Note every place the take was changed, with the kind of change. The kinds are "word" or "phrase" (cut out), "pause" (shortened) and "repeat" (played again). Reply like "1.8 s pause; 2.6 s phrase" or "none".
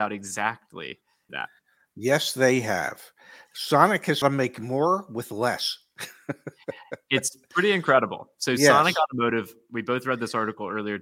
1.3 s phrase; 4.2 s phrase